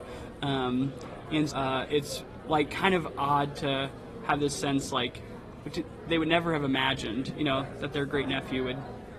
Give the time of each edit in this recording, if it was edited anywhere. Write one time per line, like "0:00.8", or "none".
0:01.5
0:01.9

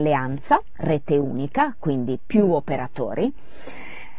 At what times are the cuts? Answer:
none

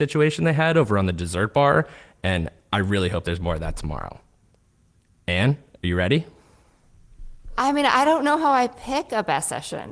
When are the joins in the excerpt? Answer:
none

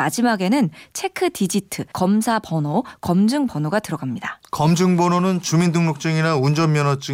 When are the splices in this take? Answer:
0:01.9

